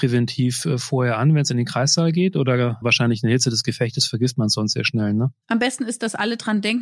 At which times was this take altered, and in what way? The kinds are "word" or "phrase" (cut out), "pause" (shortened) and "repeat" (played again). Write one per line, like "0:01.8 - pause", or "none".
0:02.8 - word
0:05.4 - pause